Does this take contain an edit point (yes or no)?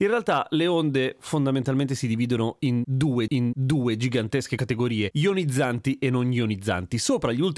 yes